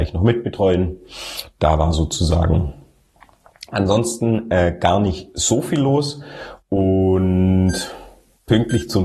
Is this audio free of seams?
yes; 0 cuts

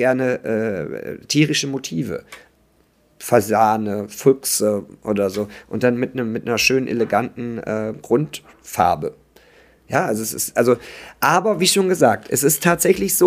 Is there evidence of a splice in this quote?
no; 0 cuts

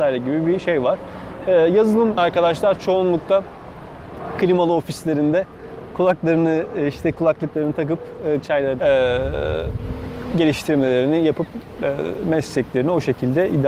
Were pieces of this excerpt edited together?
yes; 3 cuts; at 2.2 s, 8.4 s, 8.8 s

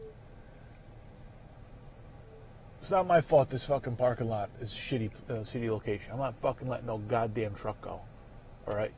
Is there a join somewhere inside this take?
no; 0 cuts

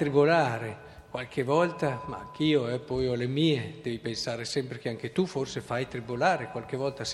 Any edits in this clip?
no; 0 cuts

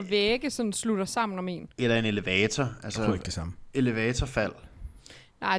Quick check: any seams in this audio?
yes; 1 cut; at 1.7 s

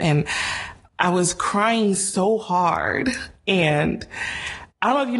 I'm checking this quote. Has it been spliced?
no; 0 cuts

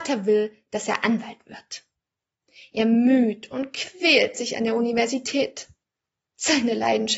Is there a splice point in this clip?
no; 0 cuts

